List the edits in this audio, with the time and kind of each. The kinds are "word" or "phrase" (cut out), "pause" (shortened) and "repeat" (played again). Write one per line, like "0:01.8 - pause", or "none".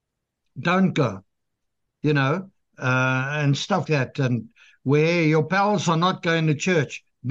0:03.8 - word